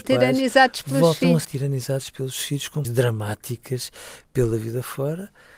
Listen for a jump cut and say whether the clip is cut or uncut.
cut